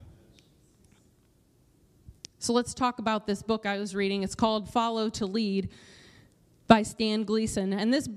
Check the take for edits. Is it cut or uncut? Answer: uncut